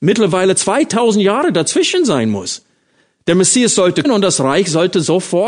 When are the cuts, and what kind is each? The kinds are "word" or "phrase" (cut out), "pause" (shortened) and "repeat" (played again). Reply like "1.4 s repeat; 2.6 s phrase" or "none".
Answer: 4.0 s word